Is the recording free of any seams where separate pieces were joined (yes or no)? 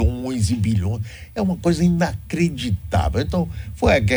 yes